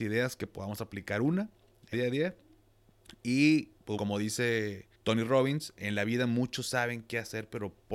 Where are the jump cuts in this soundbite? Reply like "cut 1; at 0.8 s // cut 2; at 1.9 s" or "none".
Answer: cut 1; at 1.9 s // cut 2; at 4.0 s // cut 3; at 4.9 s